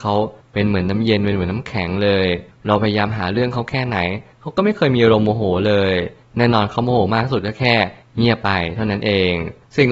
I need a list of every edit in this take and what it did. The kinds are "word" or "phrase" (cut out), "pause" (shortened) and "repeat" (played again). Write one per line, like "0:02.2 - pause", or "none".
none